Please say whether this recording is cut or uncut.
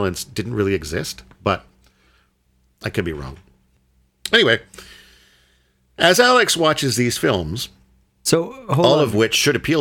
uncut